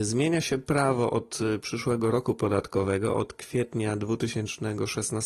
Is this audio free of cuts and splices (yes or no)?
yes